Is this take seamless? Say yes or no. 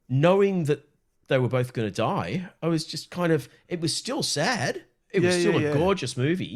yes